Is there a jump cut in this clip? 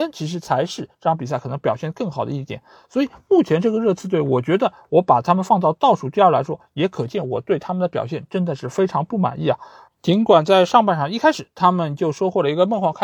no; 0 cuts

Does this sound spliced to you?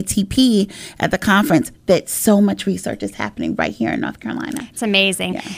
no; 0 cuts

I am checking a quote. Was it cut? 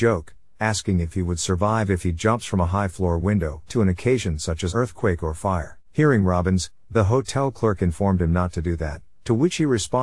yes; 3 cuts; at 3.7 s, 4.7 s, 5.8 s

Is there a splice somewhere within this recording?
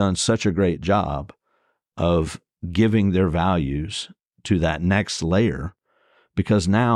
no; 0 cuts

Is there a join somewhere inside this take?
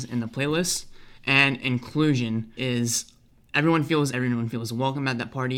yes; 3 cuts; at 1.2 s, 2.6 s, 4.1 s

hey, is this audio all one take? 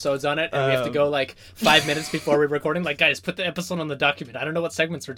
yes; 0 cuts

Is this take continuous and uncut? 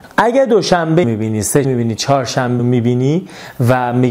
no; 3 cuts; at 1.0 s, 1.6 s, 2.6 s

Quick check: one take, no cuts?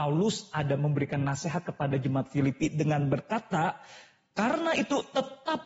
yes; 0 cuts

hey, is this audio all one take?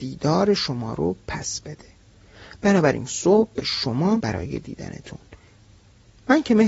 no; 3 cuts; at 3.1 s, 3.6 s, 4.2 s

